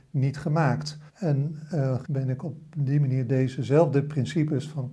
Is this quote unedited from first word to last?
no; 2 cuts; at 1.1 s, 2.0 s

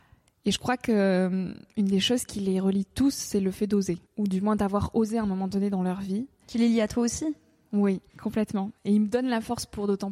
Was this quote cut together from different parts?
yes; 2 cuts; at 4.1 s, 8.1 s

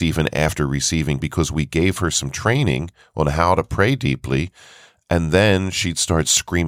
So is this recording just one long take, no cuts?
no; 1 cut; at 1.2 s

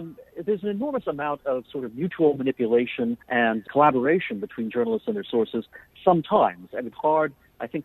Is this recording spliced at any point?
yes; 2 cuts; at 3.2 s, 6.9 s

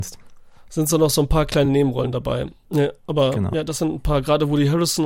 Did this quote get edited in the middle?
no; 0 cuts

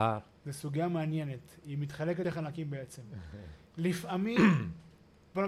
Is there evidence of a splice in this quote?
yes; 2 cuts; at 2.2 s, 3.7 s

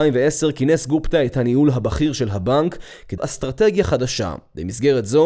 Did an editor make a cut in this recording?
yes; 2 cuts; at 1.3 s, 3.2 s

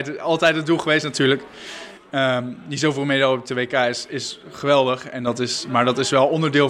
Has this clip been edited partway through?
no; 0 cuts

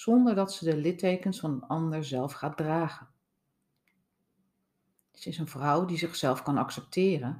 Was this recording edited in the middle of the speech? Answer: no; 0 cuts

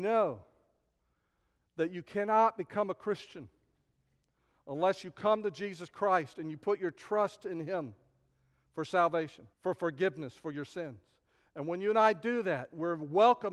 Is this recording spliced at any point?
yes; 1 cut; at 9.5 s

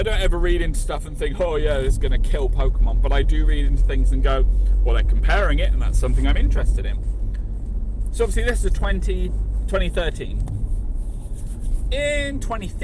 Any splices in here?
no; 0 cuts

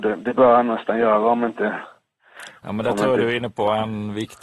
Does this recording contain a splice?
no; 0 cuts

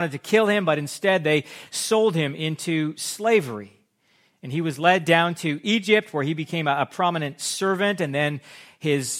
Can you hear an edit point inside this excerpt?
no; 0 cuts

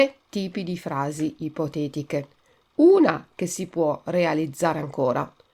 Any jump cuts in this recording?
no; 0 cuts

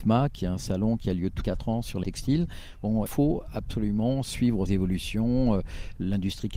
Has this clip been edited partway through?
yes; 4 cuts; at 1.4 s, 2.0 s, 3.1 s, 4.7 s

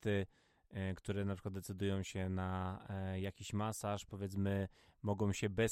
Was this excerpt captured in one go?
yes; 0 cuts

